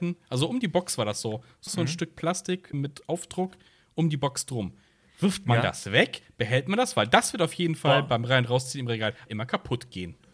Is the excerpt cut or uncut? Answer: cut